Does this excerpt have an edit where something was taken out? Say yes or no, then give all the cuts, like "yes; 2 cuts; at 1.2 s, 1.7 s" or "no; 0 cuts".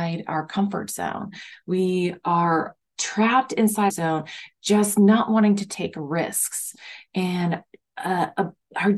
yes; 2 cuts; at 3.0 s, 3.9 s